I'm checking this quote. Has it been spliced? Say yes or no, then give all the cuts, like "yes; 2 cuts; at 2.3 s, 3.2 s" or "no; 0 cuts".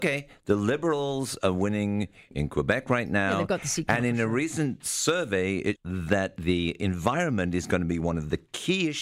yes; 1 cut; at 5.8 s